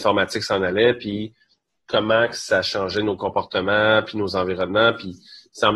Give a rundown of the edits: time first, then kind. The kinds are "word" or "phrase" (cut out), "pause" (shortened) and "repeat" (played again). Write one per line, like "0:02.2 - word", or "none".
none